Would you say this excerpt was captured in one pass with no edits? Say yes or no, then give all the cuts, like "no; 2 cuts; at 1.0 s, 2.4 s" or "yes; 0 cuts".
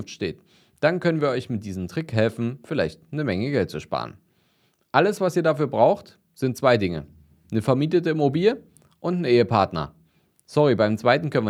yes; 0 cuts